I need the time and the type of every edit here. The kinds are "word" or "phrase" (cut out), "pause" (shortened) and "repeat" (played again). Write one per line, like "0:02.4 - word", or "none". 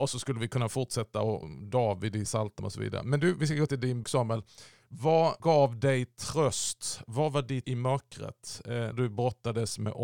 0:01.4 - word
0:02.3 - word
0:02.6 - word
0:03.7 - word
0:04.0 - word
0:05.4 - word
0:07.6 - word
0:08.9 - word